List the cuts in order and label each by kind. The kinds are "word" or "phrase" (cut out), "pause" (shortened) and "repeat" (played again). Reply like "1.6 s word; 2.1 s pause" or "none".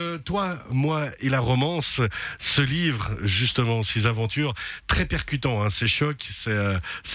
none